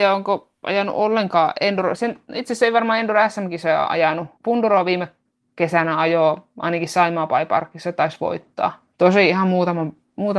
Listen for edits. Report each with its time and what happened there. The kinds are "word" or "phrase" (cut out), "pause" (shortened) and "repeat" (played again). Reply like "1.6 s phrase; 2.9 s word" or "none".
4.3 s pause; 5.2 s pause; 8.9 s pause